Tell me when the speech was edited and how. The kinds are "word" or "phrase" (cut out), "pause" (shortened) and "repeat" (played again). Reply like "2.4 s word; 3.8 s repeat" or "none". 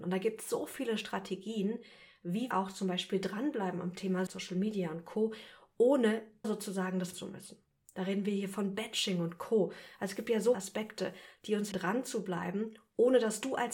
2.5 s word; 4.3 s word; 6.4 s word; 7.1 s word; 10.5 s word; 11.7 s word